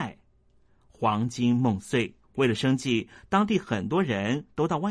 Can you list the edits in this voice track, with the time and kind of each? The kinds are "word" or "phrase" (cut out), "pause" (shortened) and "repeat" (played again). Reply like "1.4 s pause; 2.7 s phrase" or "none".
2.2 s pause